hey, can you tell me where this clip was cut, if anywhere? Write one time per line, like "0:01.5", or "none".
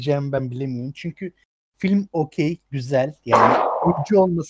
none